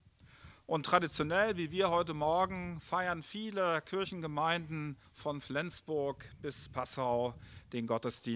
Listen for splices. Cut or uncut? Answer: cut